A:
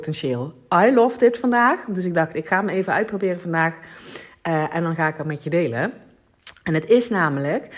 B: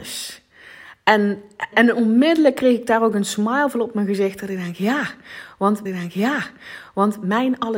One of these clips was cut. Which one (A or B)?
B